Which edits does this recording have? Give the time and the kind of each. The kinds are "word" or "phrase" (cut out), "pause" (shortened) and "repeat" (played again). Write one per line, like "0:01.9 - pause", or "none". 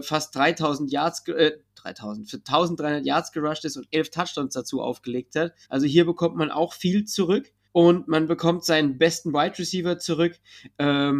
0:05.6 - pause
0:07.6 - pause